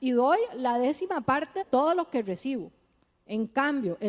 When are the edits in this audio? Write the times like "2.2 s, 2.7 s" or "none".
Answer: 1.6 s

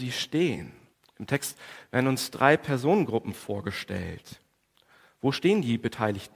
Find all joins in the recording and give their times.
0.9 s

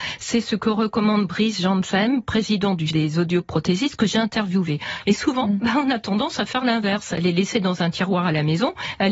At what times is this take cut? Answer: 2.9 s

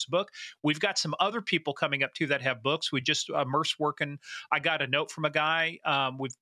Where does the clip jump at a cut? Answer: none

